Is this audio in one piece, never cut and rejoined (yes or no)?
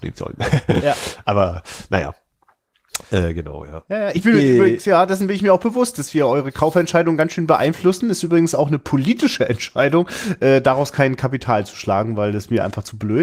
yes